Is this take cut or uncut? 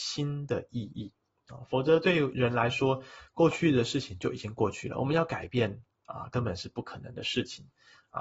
uncut